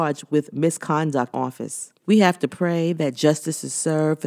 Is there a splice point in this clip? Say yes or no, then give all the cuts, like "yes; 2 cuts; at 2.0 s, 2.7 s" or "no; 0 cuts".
yes; 2 cuts; at 1.3 s, 2.0 s